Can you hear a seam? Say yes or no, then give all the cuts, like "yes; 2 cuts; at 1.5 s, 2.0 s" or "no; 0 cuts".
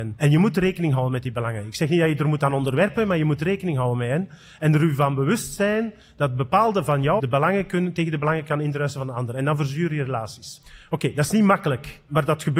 yes; 1 cut; at 7.2 s